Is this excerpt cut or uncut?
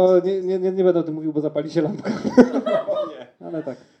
uncut